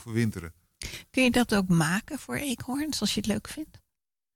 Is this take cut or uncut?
uncut